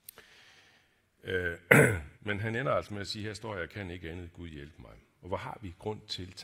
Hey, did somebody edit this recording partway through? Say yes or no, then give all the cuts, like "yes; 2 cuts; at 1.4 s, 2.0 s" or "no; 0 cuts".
yes; 1 cut; at 2.1 s